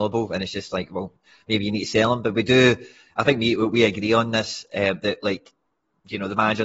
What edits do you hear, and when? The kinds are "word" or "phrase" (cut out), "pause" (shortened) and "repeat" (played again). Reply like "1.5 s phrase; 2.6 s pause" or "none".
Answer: none